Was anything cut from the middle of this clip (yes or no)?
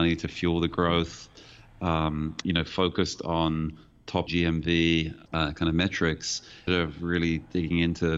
yes